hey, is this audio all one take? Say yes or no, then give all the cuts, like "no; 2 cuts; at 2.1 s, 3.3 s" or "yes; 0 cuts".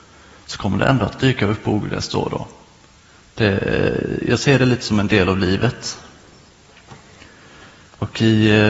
yes; 0 cuts